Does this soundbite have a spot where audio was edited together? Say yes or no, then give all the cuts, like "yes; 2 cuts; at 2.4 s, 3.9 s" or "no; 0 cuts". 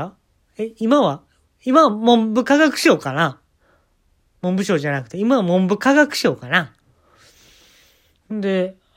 no; 0 cuts